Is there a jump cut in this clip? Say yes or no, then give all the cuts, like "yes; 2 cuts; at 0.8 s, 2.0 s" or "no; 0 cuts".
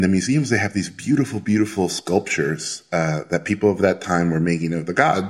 no; 0 cuts